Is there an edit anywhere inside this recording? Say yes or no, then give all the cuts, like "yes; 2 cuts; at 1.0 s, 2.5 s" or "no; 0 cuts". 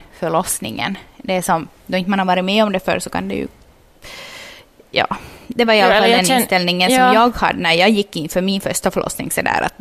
no; 0 cuts